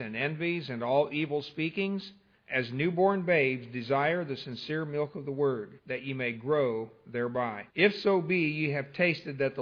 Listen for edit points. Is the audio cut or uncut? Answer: cut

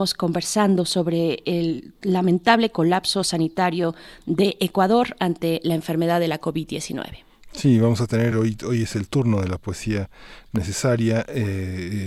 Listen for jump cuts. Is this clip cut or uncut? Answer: uncut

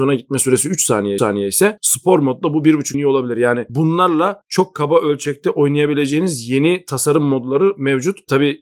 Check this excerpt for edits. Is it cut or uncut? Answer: cut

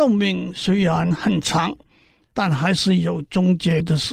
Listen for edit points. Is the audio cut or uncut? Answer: uncut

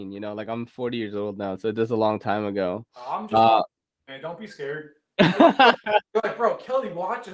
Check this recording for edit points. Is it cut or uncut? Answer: uncut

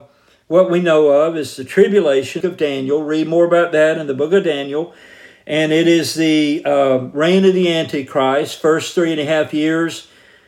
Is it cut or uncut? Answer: cut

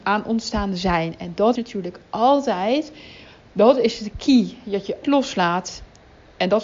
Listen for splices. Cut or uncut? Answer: cut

